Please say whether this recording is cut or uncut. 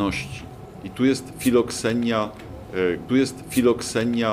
cut